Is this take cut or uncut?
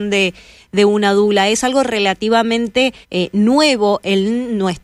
cut